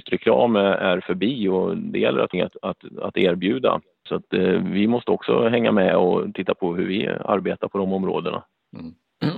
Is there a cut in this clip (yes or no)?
yes